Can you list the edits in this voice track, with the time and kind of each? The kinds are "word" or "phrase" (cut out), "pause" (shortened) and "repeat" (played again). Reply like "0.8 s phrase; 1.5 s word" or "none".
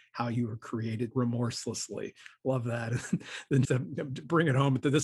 1.1 s word; 3.6 s word